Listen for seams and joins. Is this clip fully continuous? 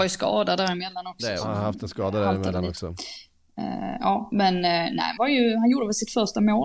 no; 1 cut; at 5.2 s

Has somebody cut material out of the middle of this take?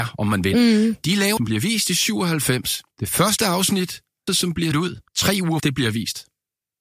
yes; 6 cuts; at 1.4 s, 2.9 s, 4.3 s, 4.7 s, 5.1 s, 5.6 s

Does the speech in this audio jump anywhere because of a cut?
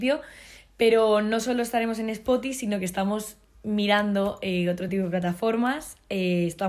no; 0 cuts

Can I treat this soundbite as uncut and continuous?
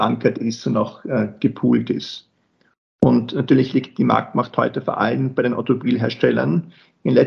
yes; 0 cuts

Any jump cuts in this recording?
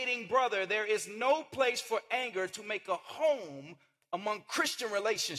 no; 0 cuts

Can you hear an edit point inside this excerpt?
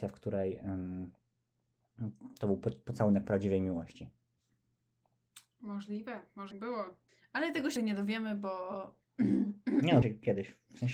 yes; 4 cuts; at 6.5 s, 7.1 s, 7.8 s, 10.0 s

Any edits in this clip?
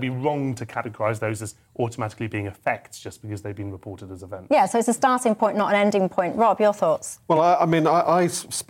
no; 0 cuts

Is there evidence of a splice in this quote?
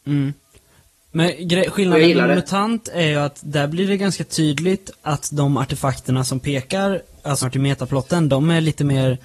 yes; 1 cut; at 7.4 s

